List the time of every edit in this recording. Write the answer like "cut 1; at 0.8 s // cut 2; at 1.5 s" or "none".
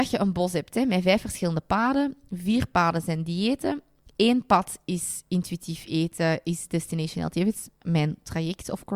none